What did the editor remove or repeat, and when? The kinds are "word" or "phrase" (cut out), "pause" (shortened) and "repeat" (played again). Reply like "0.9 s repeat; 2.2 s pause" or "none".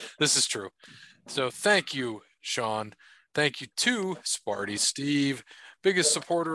none